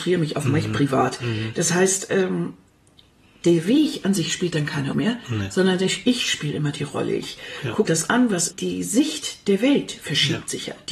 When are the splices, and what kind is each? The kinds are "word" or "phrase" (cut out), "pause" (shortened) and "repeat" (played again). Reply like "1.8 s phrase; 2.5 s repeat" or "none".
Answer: 4.9 s word; 7.9 s word; 8.5 s phrase